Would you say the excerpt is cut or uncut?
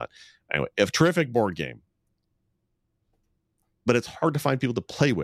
uncut